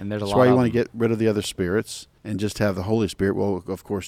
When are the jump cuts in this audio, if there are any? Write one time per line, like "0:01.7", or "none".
0:02.2